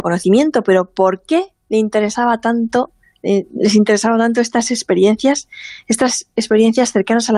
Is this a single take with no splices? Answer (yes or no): yes